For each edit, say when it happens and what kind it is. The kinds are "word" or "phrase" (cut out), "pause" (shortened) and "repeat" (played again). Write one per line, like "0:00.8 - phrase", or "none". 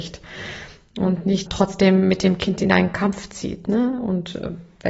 0:01.5 - word